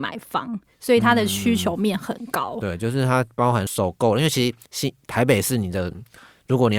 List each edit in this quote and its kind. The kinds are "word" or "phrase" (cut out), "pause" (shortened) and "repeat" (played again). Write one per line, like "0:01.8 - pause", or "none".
0:04.6 - pause